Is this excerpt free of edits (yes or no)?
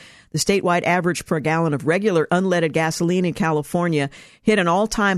no